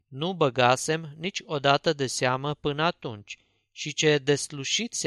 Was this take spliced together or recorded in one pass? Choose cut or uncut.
uncut